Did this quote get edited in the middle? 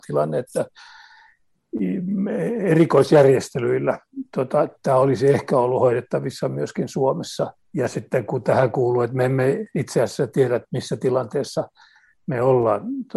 yes; 1 cut; at 7.6 s

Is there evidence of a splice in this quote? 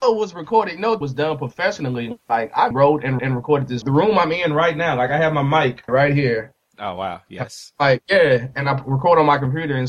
yes; 5 cuts; at 1.0 s, 2.7 s, 3.2 s, 3.8 s, 5.9 s

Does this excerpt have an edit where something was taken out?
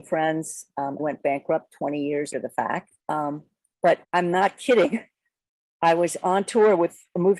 yes; 4 cuts; at 1.0 s, 2.3 s, 3.0 s, 4.0 s

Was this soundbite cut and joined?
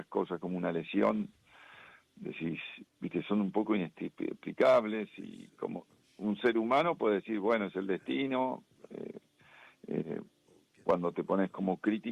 no; 0 cuts

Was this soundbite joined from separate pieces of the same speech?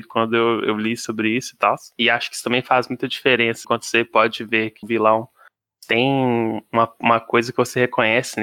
yes; 2 cuts; at 3.6 s, 4.8 s

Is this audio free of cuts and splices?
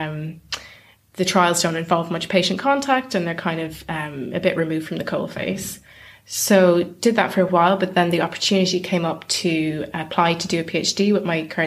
yes; 0 cuts

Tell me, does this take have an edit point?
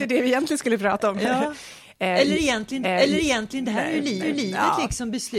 yes; 2 cuts; at 2.8 s, 4.2 s

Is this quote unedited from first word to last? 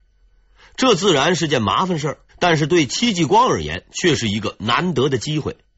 no; 1 cut; at 2.3 s

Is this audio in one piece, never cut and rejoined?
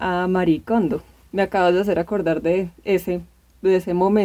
yes; 0 cuts

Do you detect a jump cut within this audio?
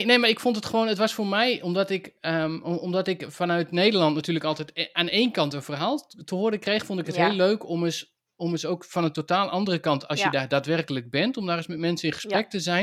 no; 0 cuts

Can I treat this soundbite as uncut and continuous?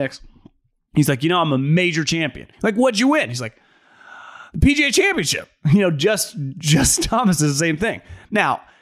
no; 1 cut; at 2.5 s

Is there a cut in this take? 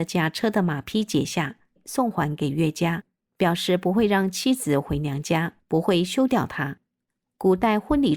no; 0 cuts

